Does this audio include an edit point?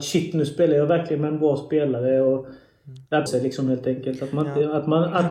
yes; 1 cut; at 3.3 s

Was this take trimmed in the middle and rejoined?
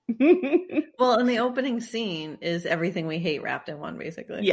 no; 0 cuts

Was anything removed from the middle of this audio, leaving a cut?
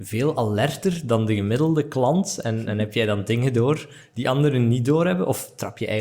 no; 0 cuts

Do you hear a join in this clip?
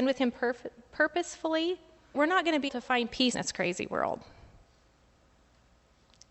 yes; 3 cuts; at 2.1 s, 2.7 s, 3.3 s

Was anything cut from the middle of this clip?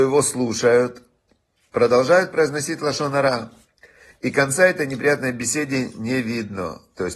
no; 0 cuts

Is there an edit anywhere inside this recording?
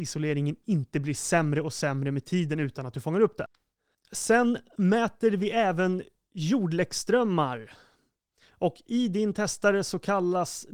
no; 0 cuts

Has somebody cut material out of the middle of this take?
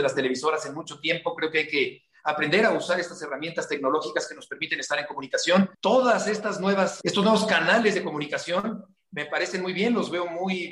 yes; 2 cuts; at 5.7 s, 7.0 s

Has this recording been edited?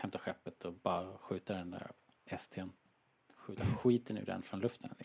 no; 0 cuts

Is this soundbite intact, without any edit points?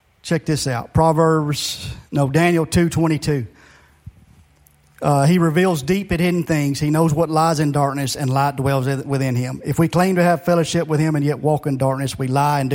yes; 0 cuts

